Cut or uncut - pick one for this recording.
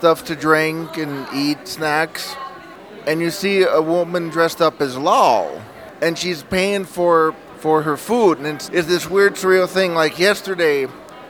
cut